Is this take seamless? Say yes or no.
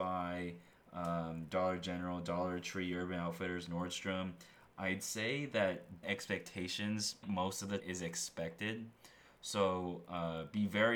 no